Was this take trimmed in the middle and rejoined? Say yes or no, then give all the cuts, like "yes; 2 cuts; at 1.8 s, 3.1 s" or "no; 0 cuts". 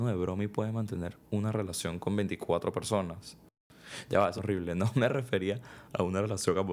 yes; 1 cut; at 4.4 s